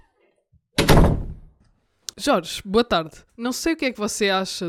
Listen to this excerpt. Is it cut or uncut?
cut